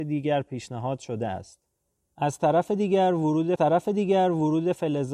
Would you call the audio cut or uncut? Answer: cut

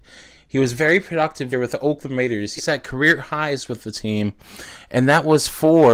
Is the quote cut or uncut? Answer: cut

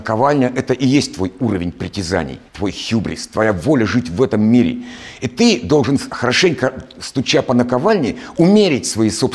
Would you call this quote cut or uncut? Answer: cut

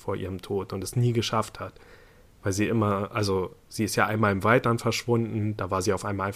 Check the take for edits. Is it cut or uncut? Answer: uncut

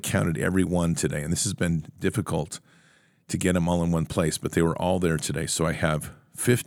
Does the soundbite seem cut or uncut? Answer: uncut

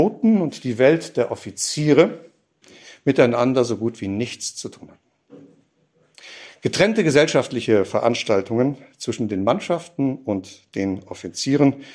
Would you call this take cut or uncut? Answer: uncut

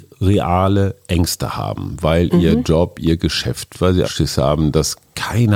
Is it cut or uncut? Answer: cut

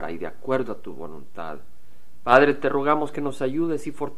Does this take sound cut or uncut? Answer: uncut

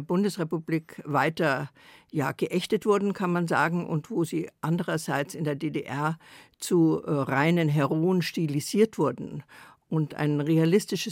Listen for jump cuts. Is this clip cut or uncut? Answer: uncut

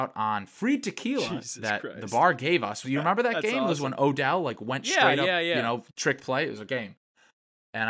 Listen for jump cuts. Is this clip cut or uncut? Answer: cut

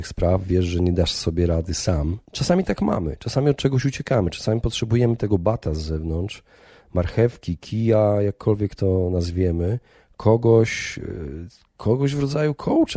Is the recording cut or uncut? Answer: uncut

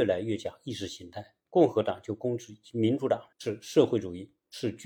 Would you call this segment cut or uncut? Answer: cut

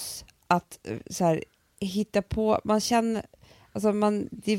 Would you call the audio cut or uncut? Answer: uncut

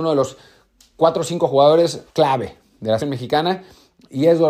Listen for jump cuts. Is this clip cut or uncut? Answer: cut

